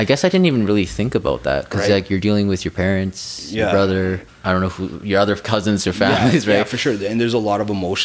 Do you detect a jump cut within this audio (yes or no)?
yes